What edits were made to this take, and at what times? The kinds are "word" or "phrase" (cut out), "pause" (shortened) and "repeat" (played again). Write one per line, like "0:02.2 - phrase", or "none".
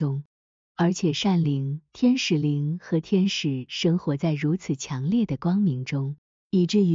0:01.9 - pause

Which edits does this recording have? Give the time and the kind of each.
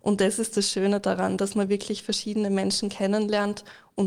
none

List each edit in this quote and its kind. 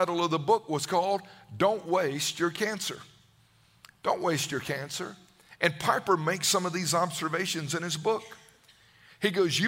none

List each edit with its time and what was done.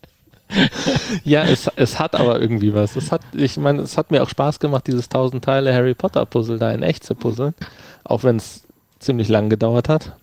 none

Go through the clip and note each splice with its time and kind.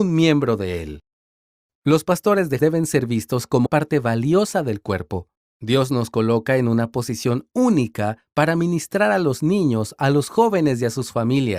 0:02.6 - word
0:03.7 - word

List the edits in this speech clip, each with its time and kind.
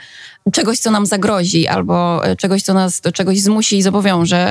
none

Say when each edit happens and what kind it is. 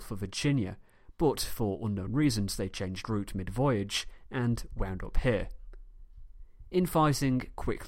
none

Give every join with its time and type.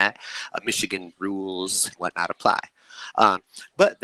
0:01.1 - word
0:02.0 - word

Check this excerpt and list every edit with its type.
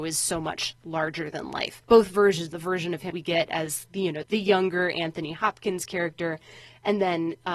0:01.8 - pause
0:02.5 - phrase
0:03.1 - word
0:04.2 - word

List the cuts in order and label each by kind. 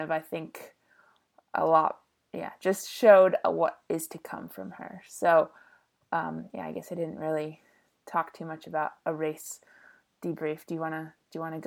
none

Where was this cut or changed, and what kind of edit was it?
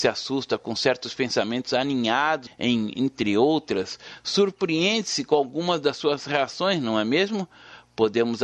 0:02.5 - phrase

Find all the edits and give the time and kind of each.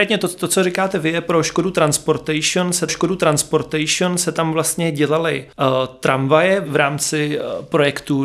0:02.9 - repeat
0:05.5 - pause

